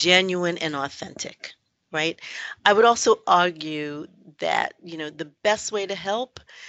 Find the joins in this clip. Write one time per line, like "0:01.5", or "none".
none

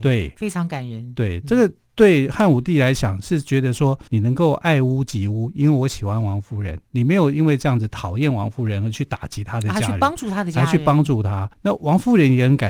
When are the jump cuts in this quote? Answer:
0:04.1
0:11.5

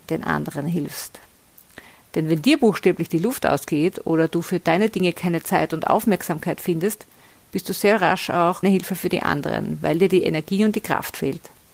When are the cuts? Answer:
0:08.6

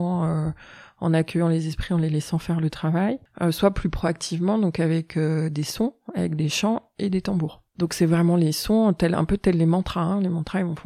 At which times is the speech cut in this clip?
0:07.7

